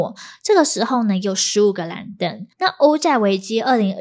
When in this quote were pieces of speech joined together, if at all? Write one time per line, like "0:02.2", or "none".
0:02.5